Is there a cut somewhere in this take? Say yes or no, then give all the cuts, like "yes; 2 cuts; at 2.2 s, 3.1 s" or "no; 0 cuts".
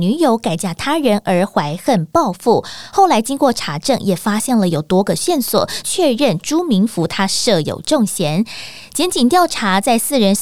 yes; 1 cut; at 5.8 s